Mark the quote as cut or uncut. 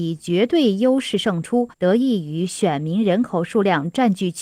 cut